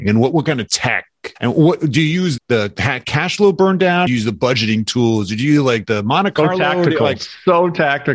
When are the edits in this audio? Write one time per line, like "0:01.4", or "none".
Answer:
0:01.4
0:02.4
0:04.1